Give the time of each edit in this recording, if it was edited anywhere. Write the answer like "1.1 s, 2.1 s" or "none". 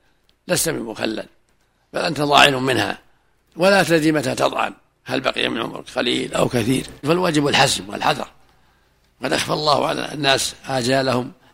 4.9 s, 7.0 s